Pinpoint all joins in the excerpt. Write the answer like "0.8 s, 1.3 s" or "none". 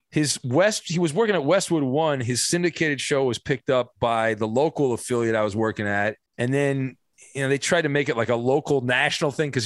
6.3 s